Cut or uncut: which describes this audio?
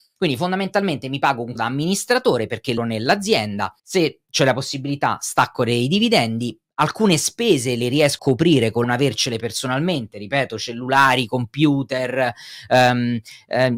cut